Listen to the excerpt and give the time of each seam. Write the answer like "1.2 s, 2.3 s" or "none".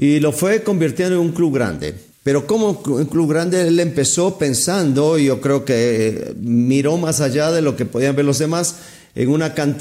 2.1 s